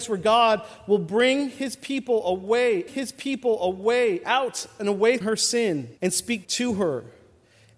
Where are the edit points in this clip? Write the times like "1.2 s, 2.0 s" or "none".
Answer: 2.9 s, 5.2 s, 6.0 s, 6.4 s